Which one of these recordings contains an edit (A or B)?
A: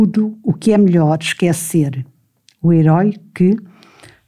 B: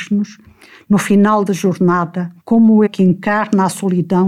B